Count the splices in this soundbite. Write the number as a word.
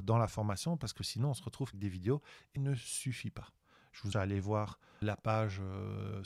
four